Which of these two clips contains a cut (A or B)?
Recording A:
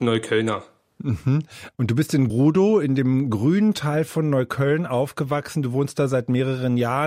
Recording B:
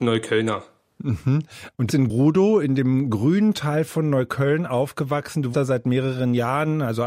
B